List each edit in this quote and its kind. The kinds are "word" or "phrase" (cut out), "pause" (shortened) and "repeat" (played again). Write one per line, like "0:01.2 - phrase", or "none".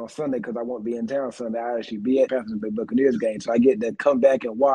0:02.3 - phrase
0:02.6 - word

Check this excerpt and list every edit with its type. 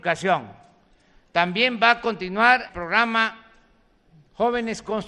0:02.7 - word

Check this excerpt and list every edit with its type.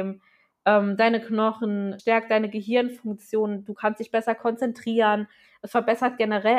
0:02.0 - word

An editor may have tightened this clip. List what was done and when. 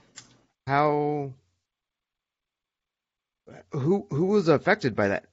none

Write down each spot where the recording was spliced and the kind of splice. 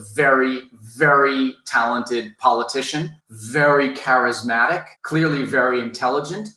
0:03.2 - pause
0:05.0 - pause

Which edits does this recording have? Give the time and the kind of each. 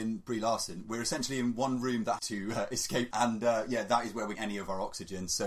0:02.2 - phrase
0:03.1 - word
0:04.3 - word

